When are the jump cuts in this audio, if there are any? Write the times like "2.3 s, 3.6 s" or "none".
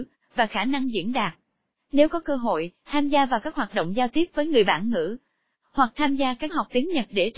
6.5 s